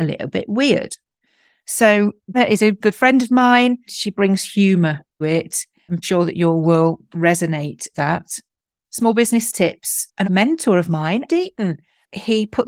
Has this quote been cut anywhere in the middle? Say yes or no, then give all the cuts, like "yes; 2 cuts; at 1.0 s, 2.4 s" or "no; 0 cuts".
yes; 9 cuts; at 2.3 s, 2.8 s, 3.9 s, 5.2 s, 6.0 s, 7.9 s, 9.5 s, 10.2 s, 11.3 s